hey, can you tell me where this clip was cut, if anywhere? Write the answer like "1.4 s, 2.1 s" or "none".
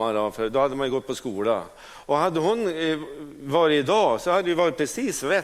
none

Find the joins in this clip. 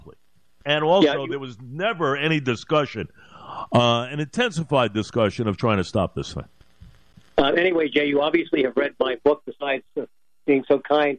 none

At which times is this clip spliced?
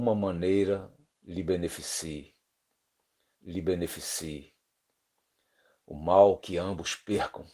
3.3 s, 6.4 s

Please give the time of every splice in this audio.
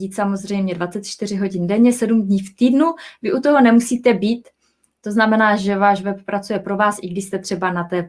none

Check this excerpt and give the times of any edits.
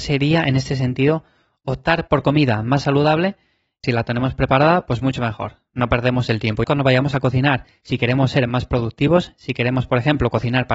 3.8 s, 6.6 s

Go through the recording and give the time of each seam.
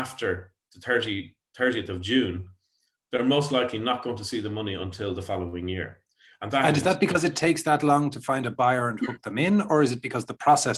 none

